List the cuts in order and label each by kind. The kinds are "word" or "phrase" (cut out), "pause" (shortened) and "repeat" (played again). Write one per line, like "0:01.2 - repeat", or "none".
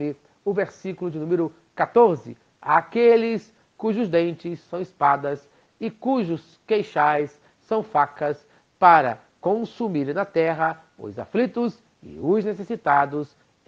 none